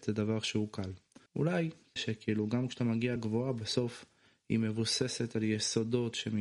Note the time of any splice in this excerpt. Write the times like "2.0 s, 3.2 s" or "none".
1.3 s, 2.0 s, 3.2 s